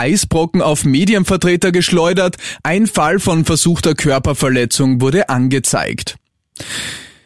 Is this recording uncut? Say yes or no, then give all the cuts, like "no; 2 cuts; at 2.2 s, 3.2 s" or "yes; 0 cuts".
yes; 0 cuts